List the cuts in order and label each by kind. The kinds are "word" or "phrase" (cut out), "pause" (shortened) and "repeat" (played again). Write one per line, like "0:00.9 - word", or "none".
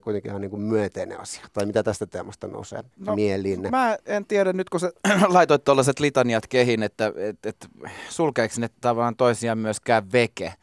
0:02.9 - pause